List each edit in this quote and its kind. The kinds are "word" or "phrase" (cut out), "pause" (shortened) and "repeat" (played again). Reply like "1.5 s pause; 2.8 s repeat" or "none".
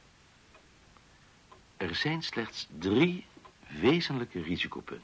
none